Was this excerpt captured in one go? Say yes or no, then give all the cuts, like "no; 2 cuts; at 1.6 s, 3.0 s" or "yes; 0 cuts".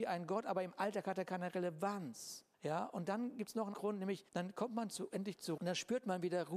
no; 4 cuts; at 2.5 s, 3.7 s, 4.3 s, 5.6 s